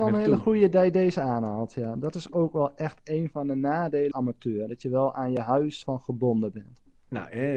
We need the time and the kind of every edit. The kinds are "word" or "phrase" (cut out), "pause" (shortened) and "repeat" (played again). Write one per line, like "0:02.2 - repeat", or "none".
0:04.1 - word
0:05.8 - word